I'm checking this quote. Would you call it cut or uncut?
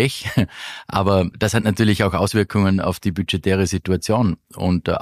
cut